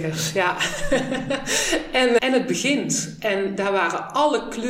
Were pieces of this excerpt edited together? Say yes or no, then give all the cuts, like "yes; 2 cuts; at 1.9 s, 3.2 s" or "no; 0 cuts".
yes; 1 cut; at 2.2 s